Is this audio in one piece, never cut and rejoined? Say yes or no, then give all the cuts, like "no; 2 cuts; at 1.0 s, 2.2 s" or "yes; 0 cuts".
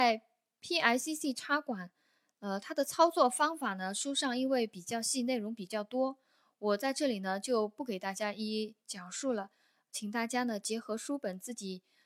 yes; 0 cuts